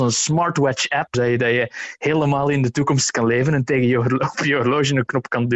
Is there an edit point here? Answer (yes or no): yes